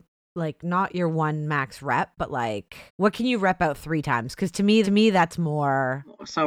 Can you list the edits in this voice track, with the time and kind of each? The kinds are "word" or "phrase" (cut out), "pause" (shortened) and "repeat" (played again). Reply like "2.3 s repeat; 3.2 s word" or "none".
2.9 s pause; 4.8 s repeat